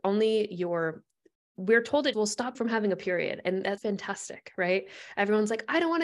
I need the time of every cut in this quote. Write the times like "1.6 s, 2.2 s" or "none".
2.1 s, 2.5 s, 3.8 s